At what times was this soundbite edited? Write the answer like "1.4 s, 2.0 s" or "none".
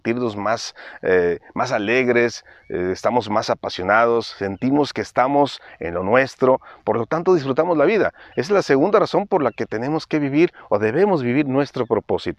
none